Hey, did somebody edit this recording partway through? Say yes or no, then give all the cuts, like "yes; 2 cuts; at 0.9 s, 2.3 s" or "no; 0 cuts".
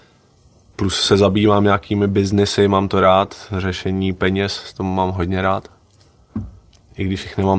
no; 0 cuts